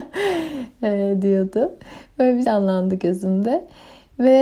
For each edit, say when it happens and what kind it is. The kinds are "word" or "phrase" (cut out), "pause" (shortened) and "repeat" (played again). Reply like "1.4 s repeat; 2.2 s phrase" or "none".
2.4 s word